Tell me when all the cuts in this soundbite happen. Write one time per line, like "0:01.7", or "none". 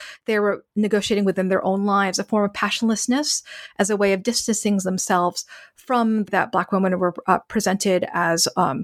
0:06.3